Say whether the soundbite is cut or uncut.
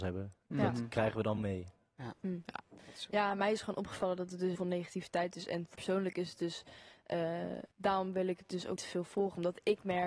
cut